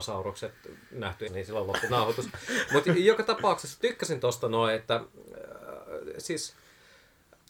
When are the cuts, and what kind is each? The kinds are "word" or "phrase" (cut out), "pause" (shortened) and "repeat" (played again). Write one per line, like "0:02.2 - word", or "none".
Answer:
0:01.3 - word
0:01.9 - word